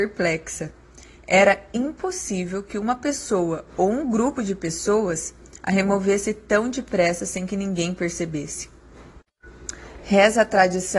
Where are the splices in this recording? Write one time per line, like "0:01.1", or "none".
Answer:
none

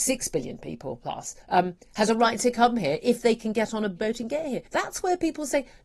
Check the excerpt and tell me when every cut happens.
0:01.4
0:04.0
0:04.7

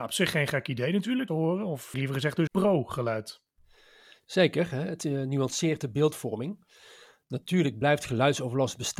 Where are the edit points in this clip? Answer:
0:01.3
0:01.9
0:02.5

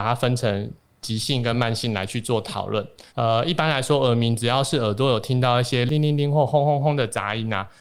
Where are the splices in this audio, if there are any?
0:03.1

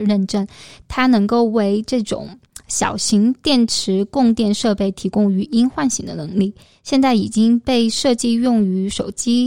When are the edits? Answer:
none

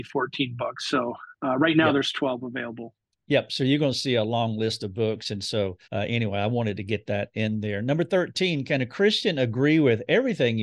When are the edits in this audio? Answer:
0:05.8

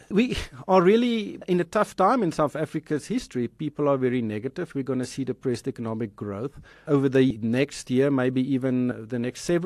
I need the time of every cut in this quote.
none

